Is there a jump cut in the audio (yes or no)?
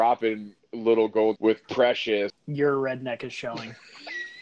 yes